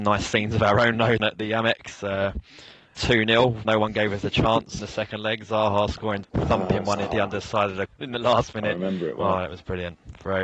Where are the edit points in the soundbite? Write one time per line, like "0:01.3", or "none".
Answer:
0:01.2
0:03.0
0:03.6
0:04.8
0:06.2
0:07.1
0:07.9